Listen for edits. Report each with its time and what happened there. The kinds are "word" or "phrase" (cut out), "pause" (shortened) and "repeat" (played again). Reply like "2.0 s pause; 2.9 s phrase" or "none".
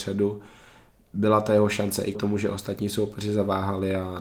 2.1 s word